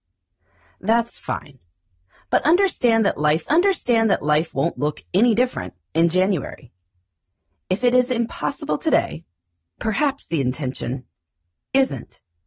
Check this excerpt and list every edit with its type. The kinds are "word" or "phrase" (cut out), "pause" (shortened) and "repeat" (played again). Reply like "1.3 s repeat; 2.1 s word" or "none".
3.5 s repeat; 9.8 s word

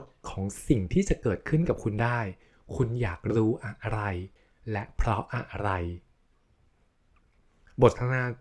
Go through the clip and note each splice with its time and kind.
none

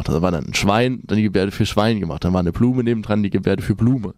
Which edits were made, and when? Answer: none

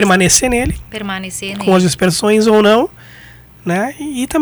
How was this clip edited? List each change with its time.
none

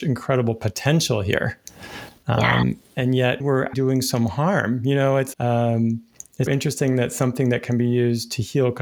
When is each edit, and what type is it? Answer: 3.4 s word; 3.7 s word; 5.3 s word; 6.5 s word

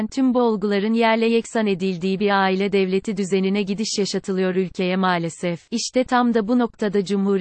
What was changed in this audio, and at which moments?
5.6 s pause

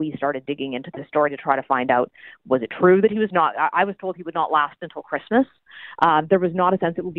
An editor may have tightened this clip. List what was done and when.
3.3 s word

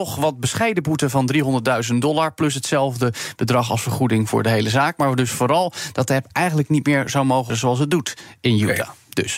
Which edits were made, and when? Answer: 7.5 s word

